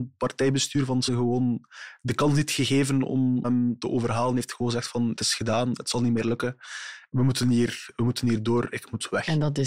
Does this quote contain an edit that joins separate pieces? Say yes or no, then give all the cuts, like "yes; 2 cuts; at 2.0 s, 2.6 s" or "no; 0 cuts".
yes; 3 cuts; at 1.1 s, 3.4 s, 5.2 s